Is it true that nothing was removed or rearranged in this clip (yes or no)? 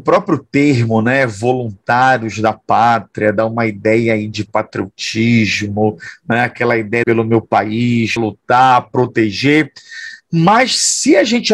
no